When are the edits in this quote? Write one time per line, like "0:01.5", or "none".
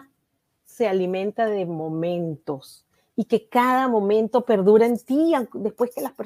none